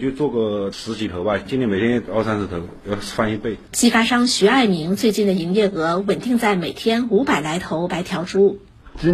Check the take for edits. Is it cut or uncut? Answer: cut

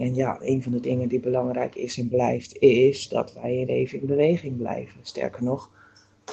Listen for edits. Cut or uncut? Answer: cut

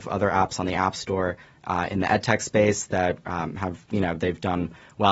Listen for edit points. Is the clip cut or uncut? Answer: uncut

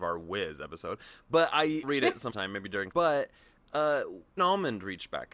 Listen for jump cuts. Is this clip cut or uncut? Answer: cut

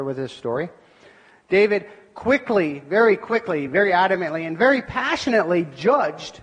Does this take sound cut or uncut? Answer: uncut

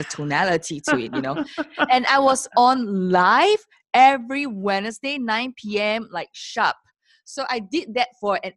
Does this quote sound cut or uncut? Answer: uncut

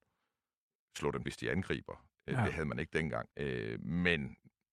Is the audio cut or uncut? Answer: cut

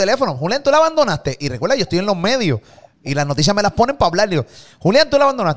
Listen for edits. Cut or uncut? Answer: uncut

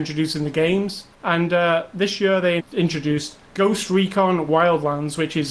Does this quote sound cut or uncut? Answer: cut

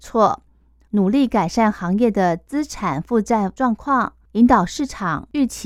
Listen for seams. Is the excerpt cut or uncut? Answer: cut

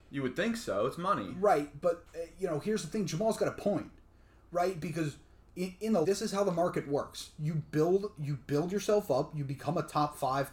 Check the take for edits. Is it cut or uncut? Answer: cut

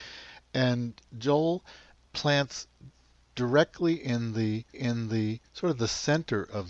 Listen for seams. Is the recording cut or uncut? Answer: cut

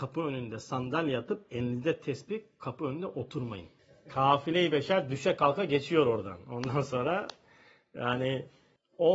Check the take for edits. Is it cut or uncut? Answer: uncut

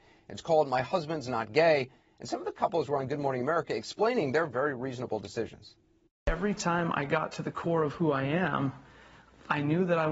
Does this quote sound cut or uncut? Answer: uncut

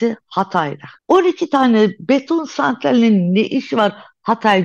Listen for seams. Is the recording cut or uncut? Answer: cut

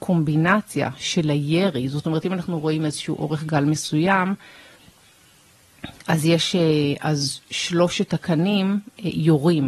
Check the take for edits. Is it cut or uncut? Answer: uncut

